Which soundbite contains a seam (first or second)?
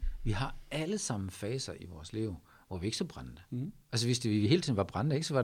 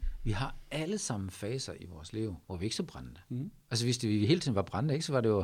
second